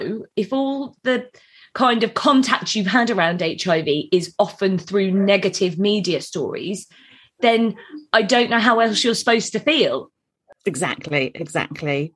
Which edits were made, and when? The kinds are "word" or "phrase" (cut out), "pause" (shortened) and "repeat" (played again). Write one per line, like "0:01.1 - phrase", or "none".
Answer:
none

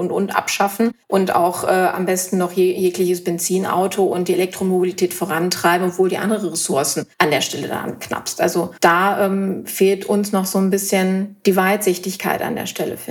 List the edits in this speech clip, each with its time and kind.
0:01.0 - pause
0:07.1 - pause
0:08.8 - pause

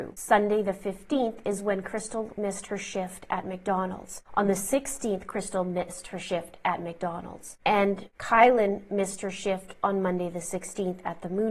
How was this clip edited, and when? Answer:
none

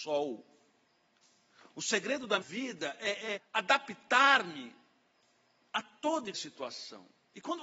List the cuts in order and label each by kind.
0:02.4 - word
0:03.4 - word
0:06.3 - word

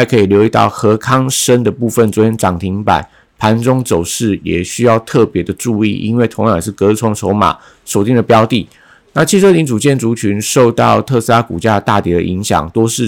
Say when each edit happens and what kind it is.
none

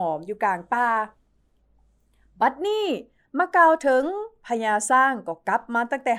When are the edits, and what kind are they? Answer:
none

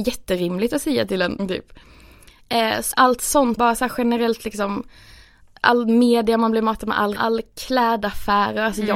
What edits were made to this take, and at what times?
0:01.4 - word
0:02.9 - word
0:03.6 - word
0:07.2 - word

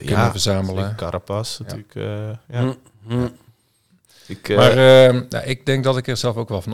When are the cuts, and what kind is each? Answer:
none

